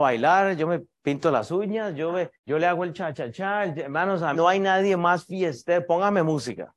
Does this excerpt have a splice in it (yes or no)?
yes